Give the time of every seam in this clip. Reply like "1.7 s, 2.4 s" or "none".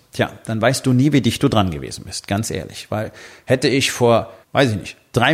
4.4 s